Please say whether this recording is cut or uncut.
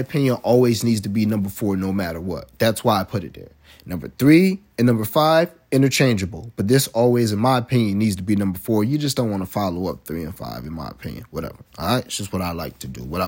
uncut